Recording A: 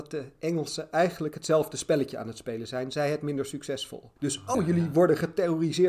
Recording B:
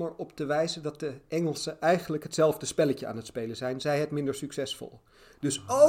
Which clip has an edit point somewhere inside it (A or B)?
A